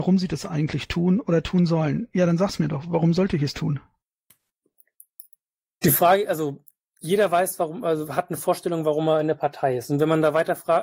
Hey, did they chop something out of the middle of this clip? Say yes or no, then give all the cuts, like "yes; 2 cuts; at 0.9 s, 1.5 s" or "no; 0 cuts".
no; 0 cuts